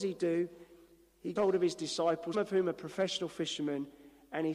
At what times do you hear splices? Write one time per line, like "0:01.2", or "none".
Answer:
0:01.4
0:02.3